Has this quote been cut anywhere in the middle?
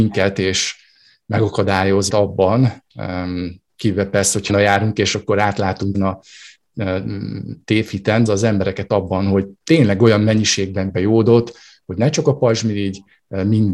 yes; 6 cuts; at 2.1 s, 4.5 s, 5.9 s, 8.3 s, 9.6 s, 10.9 s

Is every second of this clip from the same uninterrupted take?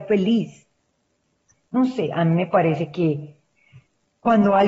yes; 0 cuts

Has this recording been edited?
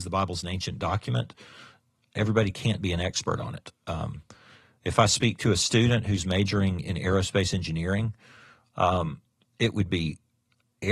no; 0 cuts

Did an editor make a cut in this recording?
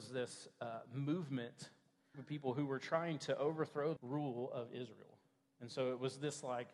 yes; 2 cuts; at 2.1 s, 4.0 s

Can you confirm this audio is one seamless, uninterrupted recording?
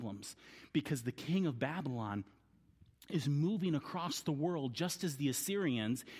yes; 0 cuts

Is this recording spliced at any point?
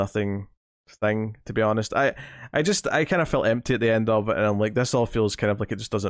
no; 0 cuts

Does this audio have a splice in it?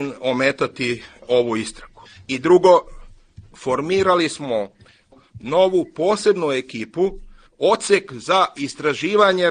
no; 0 cuts

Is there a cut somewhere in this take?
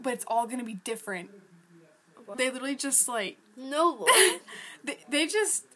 yes; 1 cut; at 2.3 s

